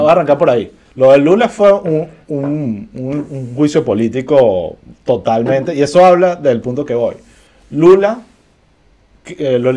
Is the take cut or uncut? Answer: uncut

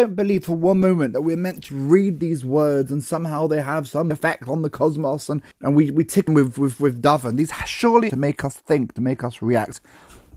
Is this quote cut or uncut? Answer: cut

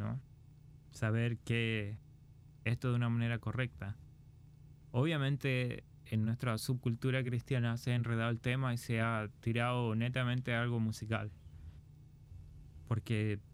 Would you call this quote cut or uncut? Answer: uncut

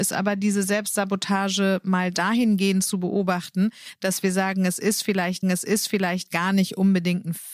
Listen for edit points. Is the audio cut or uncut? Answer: cut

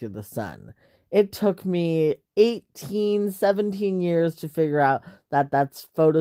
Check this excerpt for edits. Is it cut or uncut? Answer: uncut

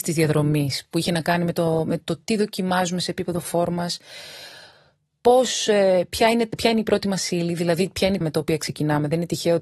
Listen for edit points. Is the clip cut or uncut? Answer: cut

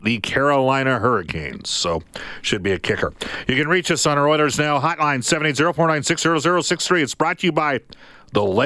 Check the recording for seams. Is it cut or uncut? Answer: uncut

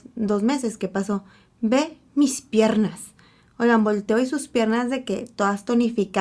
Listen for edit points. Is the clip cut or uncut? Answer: uncut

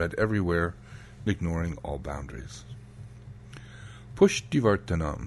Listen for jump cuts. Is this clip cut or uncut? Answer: cut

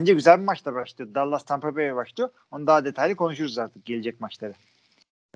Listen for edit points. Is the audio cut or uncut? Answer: uncut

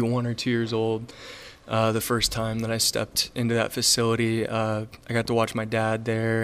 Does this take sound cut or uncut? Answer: uncut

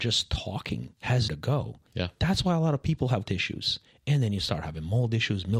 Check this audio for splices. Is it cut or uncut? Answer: cut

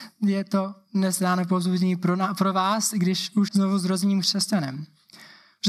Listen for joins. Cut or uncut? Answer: cut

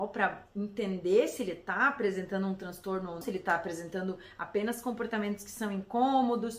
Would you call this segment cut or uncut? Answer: cut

